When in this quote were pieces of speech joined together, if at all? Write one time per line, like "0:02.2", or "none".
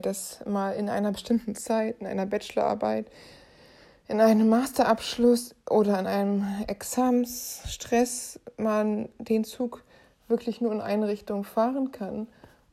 none